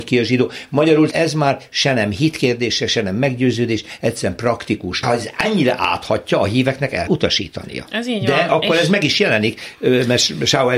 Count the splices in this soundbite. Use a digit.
3